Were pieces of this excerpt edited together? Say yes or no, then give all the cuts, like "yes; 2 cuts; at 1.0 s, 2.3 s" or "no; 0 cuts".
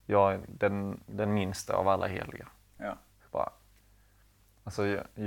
no; 0 cuts